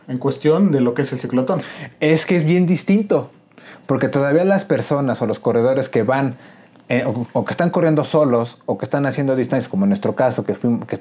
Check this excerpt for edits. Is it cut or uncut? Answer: uncut